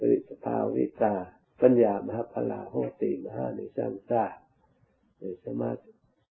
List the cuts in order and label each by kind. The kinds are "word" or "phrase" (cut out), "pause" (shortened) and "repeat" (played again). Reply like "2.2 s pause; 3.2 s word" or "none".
1.4 s pause